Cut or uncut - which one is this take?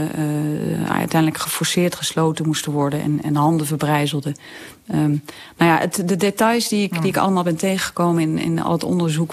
uncut